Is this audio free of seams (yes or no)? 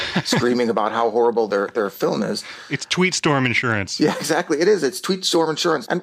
yes